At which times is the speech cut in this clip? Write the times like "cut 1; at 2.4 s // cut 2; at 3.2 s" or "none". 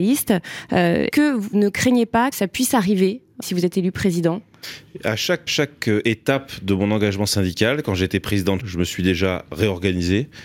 cut 1; at 1.1 s // cut 2; at 1.5 s // cut 3; at 2.3 s // cut 4; at 3.4 s // cut 5; at 5.5 s // cut 6; at 8.6 s